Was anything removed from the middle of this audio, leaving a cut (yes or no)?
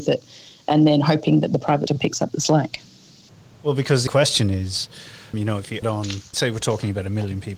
yes